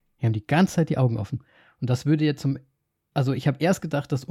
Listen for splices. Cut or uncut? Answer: uncut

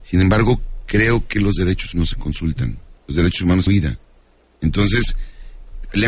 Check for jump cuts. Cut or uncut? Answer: cut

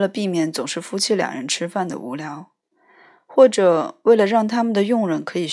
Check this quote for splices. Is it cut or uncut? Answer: uncut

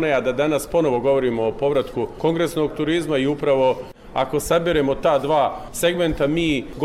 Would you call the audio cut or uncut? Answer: uncut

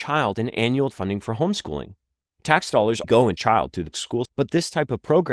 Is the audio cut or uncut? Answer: cut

